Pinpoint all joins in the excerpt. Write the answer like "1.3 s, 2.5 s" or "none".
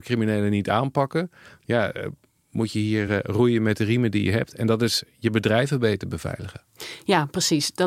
none